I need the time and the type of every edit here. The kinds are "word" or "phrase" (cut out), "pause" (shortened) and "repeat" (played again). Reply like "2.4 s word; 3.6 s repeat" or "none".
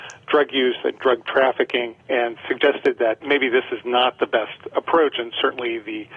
2.0 s pause; 3.2 s word